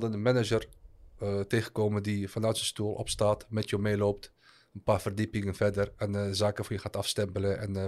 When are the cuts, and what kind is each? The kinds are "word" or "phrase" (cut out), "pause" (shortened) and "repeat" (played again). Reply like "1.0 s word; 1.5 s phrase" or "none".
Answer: none